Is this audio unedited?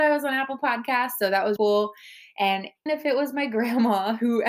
no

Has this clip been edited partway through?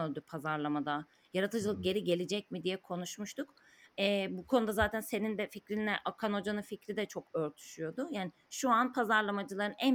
no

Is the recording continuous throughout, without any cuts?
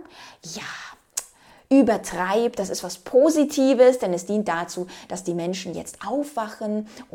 yes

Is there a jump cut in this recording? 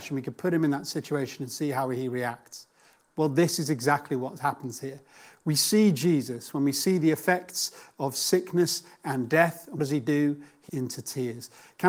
yes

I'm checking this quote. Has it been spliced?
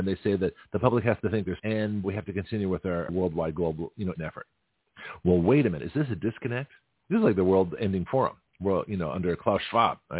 yes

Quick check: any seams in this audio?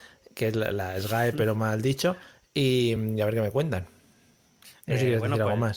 no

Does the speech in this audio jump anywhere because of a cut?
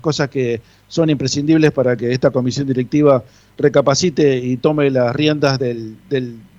no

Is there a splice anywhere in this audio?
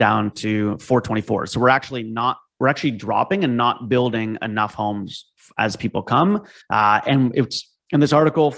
yes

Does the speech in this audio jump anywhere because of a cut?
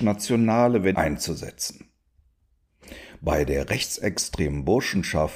yes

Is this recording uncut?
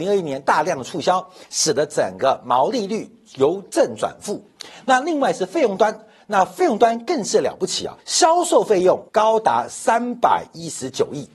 no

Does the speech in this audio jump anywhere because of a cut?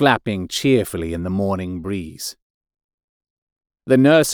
no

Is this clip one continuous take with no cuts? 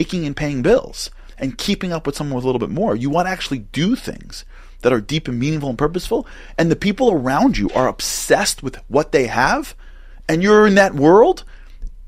yes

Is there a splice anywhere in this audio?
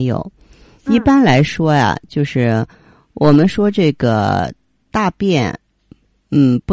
no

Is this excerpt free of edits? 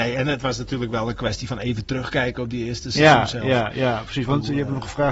yes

